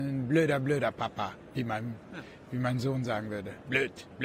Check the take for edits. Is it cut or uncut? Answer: uncut